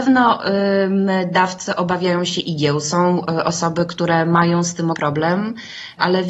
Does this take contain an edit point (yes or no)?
yes